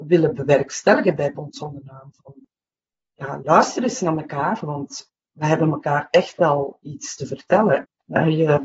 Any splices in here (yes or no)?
no